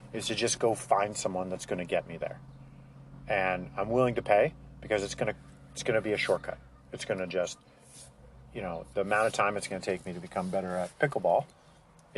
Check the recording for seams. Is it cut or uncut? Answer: uncut